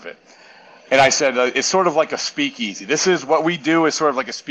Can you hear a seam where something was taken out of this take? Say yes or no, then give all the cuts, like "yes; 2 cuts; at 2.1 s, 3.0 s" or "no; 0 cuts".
no; 0 cuts